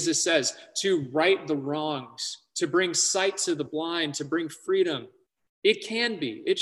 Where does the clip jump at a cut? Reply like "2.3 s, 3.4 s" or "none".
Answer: none